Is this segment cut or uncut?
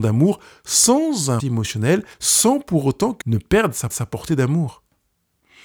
cut